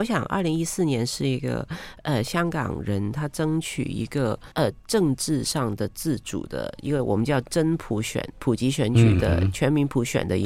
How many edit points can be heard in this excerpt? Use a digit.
1